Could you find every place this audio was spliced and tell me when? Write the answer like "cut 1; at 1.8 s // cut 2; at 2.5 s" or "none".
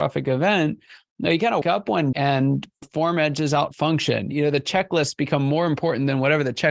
cut 1; at 1.6 s // cut 2; at 2.1 s // cut 3; at 2.8 s